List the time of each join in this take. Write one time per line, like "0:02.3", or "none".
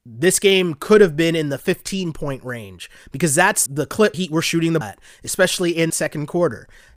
0:03.7
0:04.1
0:04.8
0:05.9